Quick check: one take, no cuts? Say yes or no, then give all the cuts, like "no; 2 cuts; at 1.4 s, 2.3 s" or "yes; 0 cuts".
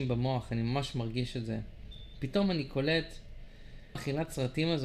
no; 1 cut; at 4.0 s